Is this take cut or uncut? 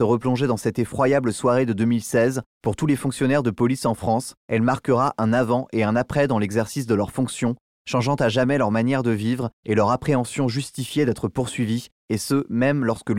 uncut